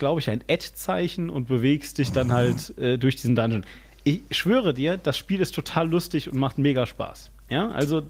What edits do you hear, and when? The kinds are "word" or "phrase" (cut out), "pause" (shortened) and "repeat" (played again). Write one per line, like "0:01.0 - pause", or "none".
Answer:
none